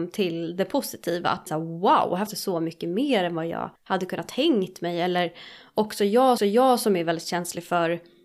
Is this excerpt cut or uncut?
cut